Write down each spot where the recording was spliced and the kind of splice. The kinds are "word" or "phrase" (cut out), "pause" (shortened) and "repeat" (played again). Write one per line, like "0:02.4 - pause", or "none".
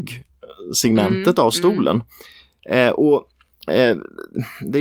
none

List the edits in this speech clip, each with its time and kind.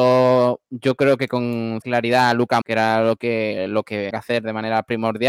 0:01.8 - word
0:02.6 - word
0:04.1 - word

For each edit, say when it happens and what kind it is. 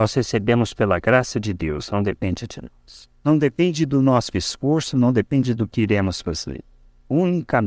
0:03.2 - pause

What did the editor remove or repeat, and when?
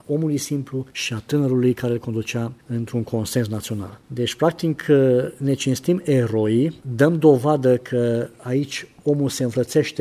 none

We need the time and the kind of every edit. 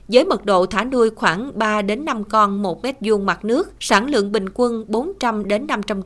0:03.8 - pause

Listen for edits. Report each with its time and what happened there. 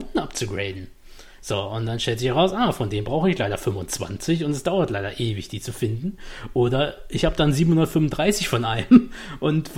none

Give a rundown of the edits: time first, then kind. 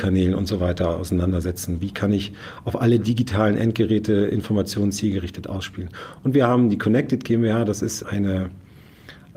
0:08.0 - word

